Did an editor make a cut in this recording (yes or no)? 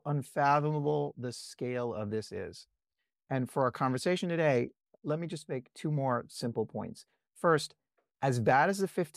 no